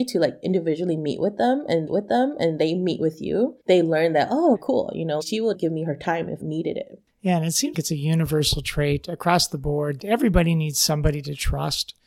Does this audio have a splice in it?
yes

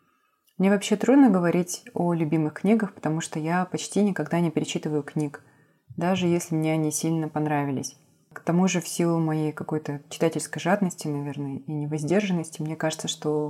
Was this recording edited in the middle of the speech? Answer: no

